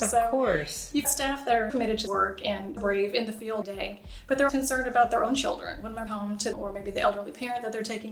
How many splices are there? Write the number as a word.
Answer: eight